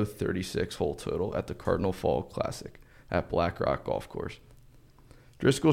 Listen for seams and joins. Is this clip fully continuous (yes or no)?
yes